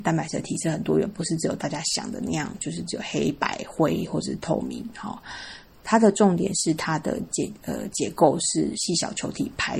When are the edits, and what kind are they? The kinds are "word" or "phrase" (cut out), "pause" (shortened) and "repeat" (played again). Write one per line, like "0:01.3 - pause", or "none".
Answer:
none